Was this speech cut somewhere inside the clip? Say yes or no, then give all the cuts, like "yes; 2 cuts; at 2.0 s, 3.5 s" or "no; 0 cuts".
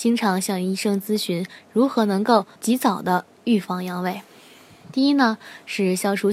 yes; 1 cut; at 2.6 s